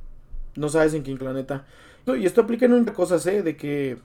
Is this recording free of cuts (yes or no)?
no